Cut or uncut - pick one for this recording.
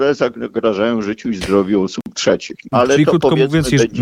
uncut